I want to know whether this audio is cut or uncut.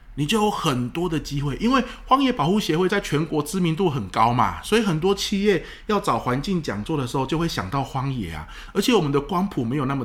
uncut